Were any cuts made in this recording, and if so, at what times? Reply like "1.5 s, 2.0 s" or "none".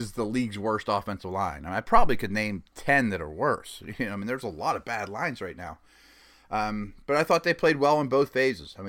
none